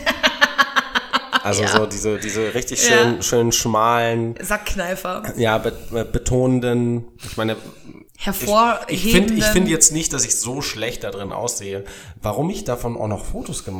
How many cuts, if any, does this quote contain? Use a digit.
1